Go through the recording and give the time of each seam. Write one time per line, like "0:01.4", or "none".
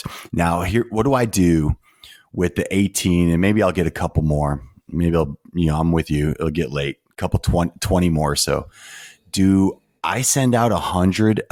none